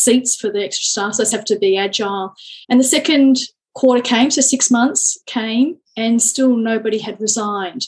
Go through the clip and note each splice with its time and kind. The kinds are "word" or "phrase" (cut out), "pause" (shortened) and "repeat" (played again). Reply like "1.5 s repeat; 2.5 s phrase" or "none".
1.3 s phrase; 2.6 s pause; 5.9 s pause